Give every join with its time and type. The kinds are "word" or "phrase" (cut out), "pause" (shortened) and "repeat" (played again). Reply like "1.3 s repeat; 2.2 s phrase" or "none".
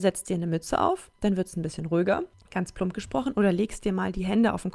1.2 s pause; 2.3 s pause